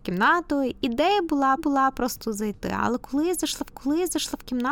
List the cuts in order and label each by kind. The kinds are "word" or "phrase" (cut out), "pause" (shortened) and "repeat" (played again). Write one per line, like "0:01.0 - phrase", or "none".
0:01.6 - repeat
0:03.7 - repeat